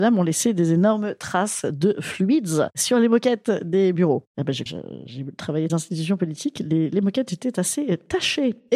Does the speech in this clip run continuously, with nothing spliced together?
no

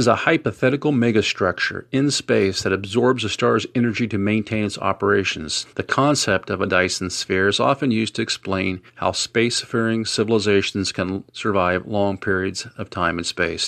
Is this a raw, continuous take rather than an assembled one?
no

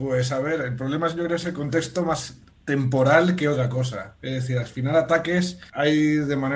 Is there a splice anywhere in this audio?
no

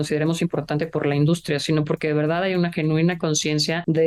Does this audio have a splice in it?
no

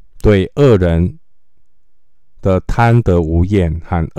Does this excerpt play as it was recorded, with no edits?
yes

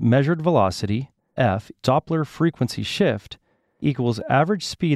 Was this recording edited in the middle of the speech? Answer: yes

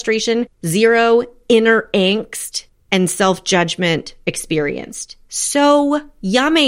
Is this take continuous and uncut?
yes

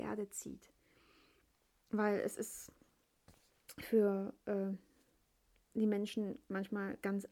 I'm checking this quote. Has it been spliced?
no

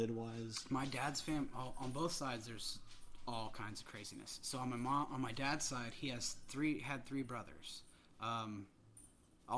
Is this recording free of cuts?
yes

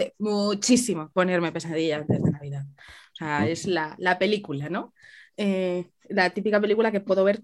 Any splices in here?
no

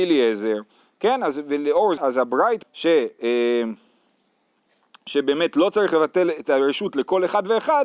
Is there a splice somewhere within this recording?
yes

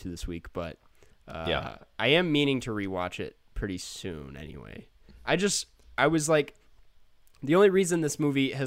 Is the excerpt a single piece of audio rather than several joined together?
yes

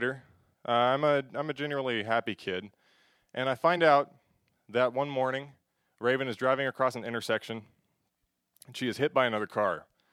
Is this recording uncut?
yes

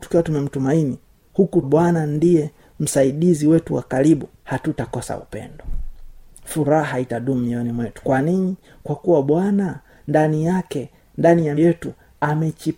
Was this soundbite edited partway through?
yes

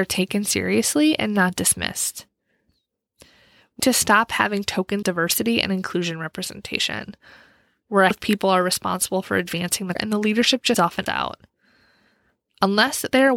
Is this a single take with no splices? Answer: no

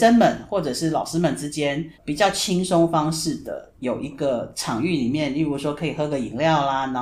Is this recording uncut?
no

